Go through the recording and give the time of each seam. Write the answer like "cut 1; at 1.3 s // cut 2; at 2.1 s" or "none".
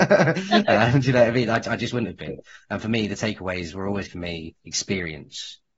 cut 1; at 4.1 s // cut 2; at 4.6 s